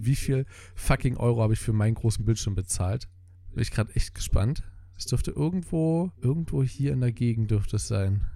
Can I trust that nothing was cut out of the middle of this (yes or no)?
no